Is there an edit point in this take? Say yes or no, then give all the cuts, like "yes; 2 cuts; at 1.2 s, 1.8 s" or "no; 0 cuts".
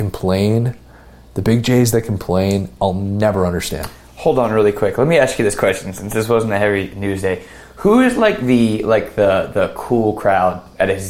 no; 0 cuts